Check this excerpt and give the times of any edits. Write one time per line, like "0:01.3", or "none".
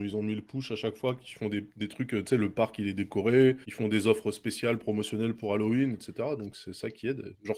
0:03.6

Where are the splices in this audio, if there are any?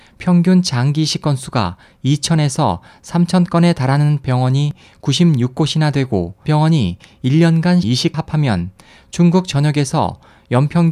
0:06.4
0:07.8
0:08.1

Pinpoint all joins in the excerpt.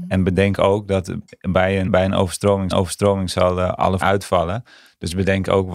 0:01.9
0:02.7
0:04.0

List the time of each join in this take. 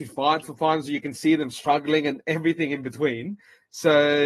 none

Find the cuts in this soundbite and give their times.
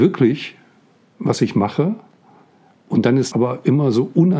0:03.3

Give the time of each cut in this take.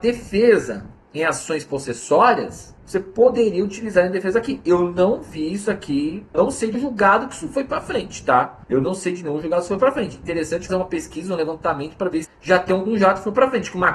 0:02.8
0:06.3
0:06.7
0:08.6
0:10.7
0:12.2

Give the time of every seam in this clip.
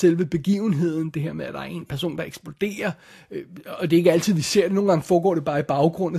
none

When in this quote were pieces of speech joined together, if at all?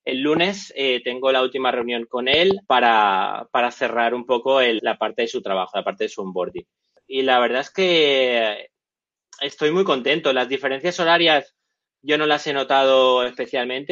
0:02.1
0:02.6
0:04.8

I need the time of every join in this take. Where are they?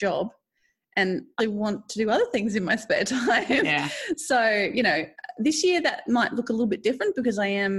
0:01.4

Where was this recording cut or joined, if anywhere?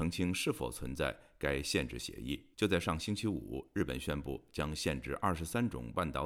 0:02.5

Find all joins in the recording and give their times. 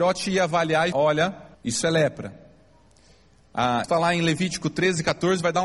0:00.9
0:01.5
0:03.8

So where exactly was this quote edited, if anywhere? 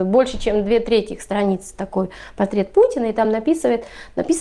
none

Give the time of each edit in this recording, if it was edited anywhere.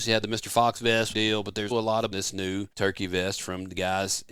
0:01.1
0:01.7
0:02.1
0:02.7

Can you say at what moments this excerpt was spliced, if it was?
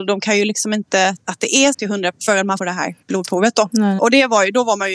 0:01.2
0:01.7
0:02.1
0:02.6
0:03.0
0:04.0

